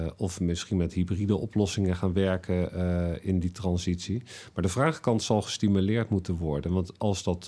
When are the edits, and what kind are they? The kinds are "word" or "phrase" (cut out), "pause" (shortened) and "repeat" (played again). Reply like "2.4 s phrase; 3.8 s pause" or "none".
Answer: none